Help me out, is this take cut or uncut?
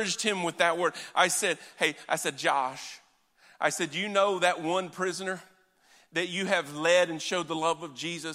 uncut